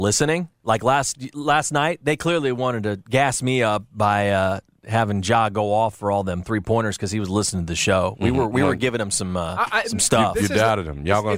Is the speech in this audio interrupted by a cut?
no; 0 cuts

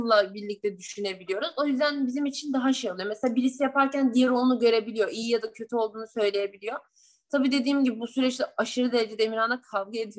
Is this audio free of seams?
yes; 0 cuts

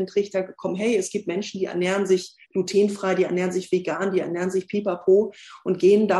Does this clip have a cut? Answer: yes; 1 cut; at 2.4 s

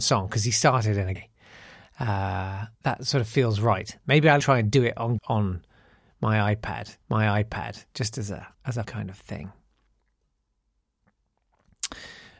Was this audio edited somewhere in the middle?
yes; 7 cuts; at 1.2 s, 2.7 s, 4.4 s, 5.2 s, 7.0 s, 8.5 s, 8.8 s

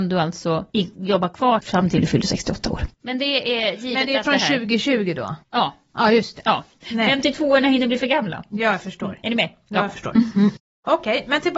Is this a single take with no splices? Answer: yes; 0 cuts

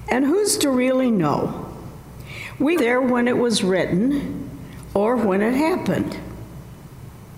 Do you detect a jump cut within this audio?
yes; 1 cut; at 2.8 s

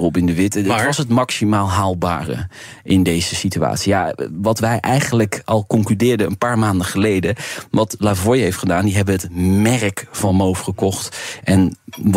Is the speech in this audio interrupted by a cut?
no; 0 cuts

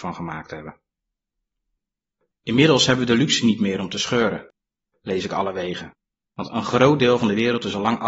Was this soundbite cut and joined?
no; 0 cuts

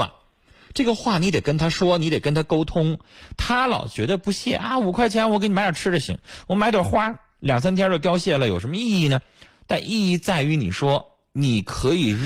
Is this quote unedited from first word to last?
yes; 0 cuts

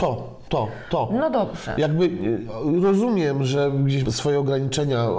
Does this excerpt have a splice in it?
yes; 1 cut; at 4.0 s

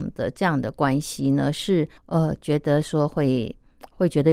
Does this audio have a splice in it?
yes; 1 cut; at 2.0 s

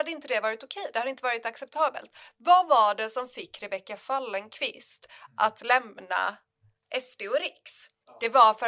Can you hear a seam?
no; 0 cuts

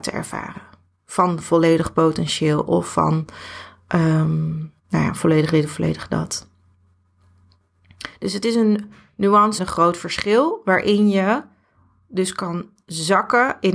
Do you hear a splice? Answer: yes; 2 cuts; at 4.8 s, 9.6 s

